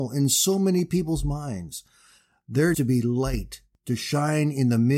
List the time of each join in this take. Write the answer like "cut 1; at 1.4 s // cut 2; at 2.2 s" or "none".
cut 1; at 2.7 s